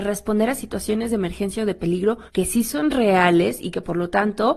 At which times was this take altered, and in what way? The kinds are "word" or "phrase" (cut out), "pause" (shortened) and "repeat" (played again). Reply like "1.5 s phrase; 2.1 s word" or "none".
2.3 s pause